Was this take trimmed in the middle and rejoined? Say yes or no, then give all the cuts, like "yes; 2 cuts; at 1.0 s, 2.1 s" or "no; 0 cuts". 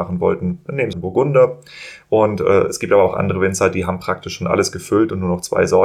yes; 1 cut; at 0.9 s